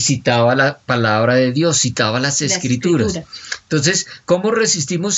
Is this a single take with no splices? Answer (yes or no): yes